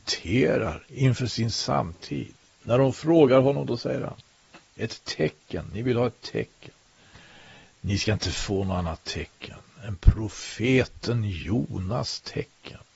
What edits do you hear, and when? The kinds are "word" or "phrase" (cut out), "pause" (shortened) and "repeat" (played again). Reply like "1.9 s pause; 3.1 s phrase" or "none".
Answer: none